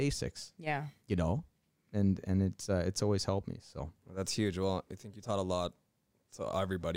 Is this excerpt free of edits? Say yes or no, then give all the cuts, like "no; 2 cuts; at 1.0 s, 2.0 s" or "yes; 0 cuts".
yes; 0 cuts